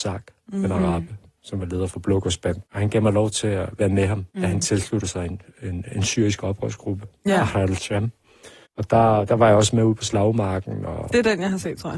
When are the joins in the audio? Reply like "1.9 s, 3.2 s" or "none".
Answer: 2.7 s, 4.3 s, 8.6 s